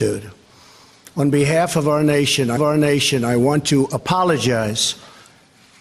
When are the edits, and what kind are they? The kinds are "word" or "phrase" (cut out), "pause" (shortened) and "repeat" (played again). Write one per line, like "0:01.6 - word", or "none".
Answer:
0:02.6 - repeat